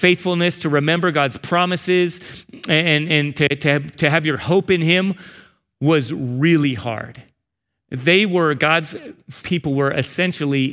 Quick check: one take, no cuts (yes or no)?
yes